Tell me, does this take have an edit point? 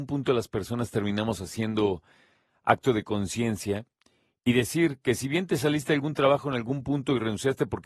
no; 0 cuts

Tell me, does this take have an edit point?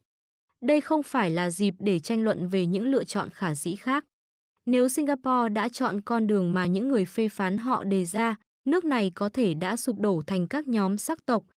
no; 0 cuts

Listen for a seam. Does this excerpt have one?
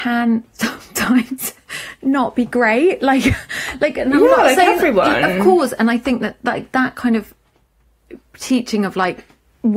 no; 0 cuts

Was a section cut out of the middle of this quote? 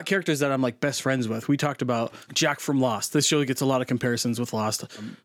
no; 0 cuts

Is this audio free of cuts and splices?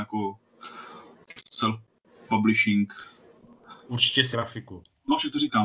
no; 1 cut; at 4.3 s

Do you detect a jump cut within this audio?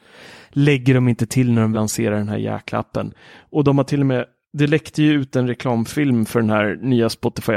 yes; 1 cut; at 1.7 s

